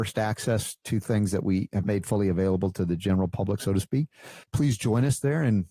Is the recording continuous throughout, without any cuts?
no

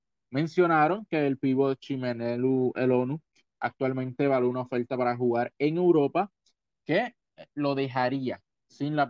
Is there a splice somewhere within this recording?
no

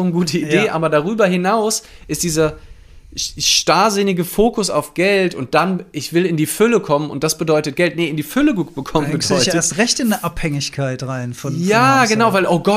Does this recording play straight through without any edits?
yes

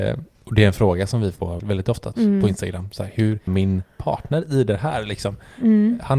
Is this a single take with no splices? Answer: no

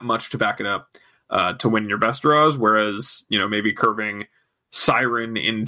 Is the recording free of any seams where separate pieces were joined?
yes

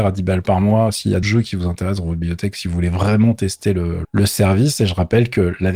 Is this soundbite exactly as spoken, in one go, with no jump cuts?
no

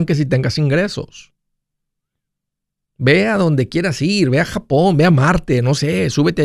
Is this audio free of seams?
yes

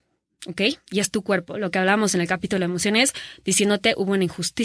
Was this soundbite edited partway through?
no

